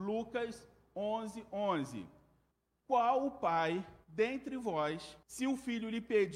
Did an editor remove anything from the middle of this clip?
yes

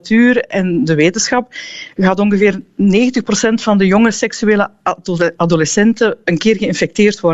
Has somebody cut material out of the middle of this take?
no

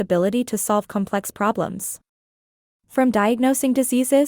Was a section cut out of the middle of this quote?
no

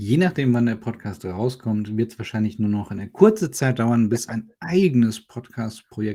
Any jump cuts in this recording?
no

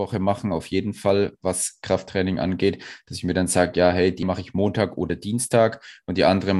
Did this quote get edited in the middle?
yes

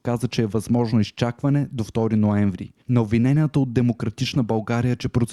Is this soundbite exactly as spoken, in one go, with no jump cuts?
yes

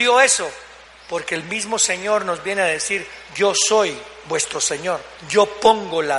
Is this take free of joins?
no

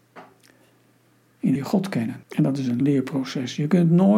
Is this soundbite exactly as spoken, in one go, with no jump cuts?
no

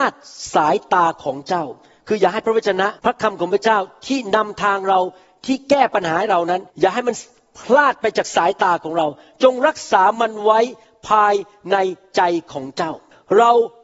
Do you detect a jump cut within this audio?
yes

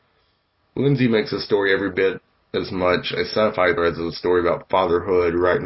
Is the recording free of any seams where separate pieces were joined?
no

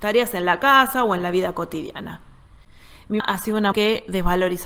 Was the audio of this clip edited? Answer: yes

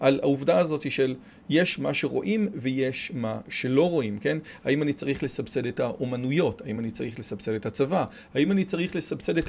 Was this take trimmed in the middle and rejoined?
no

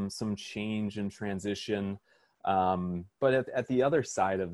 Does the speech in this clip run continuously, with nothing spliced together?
no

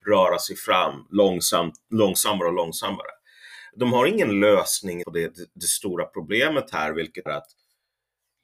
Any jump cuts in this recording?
yes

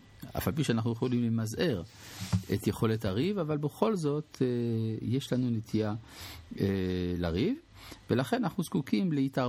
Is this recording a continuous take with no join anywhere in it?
yes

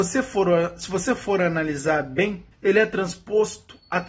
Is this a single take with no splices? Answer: no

